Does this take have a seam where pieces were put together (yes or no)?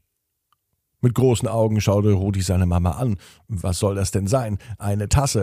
no